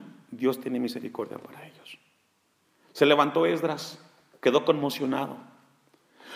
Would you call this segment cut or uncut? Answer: uncut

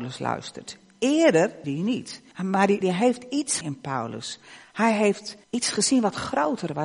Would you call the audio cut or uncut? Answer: cut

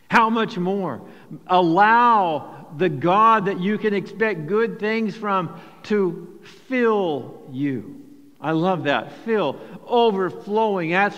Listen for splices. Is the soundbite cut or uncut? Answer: uncut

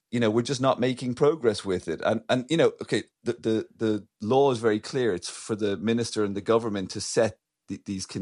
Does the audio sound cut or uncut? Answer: cut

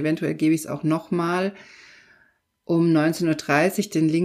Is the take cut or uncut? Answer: uncut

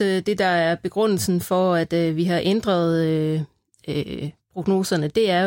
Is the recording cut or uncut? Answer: uncut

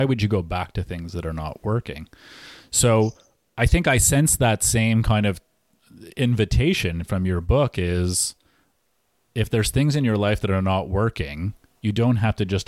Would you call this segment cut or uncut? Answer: uncut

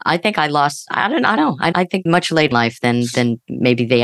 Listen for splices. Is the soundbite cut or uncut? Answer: cut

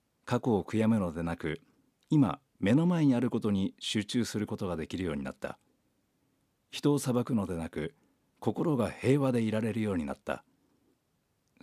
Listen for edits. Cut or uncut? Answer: uncut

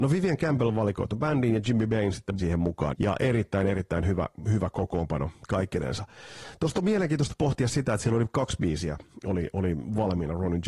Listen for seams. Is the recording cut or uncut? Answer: cut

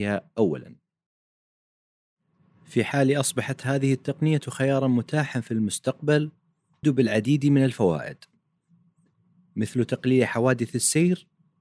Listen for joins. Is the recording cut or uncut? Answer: cut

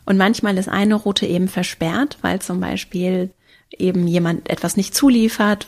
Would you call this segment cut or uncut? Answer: uncut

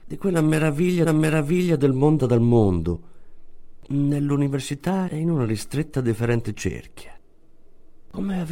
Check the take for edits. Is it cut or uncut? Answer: cut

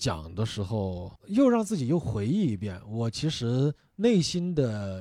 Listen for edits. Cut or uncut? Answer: cut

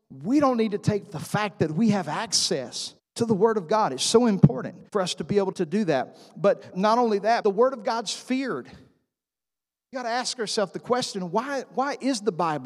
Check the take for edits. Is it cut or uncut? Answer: cut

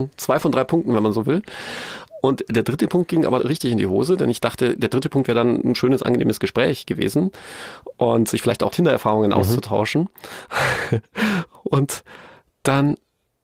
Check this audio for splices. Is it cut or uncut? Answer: cut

